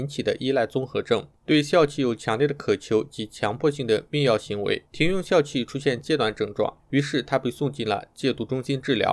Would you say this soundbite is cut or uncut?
cut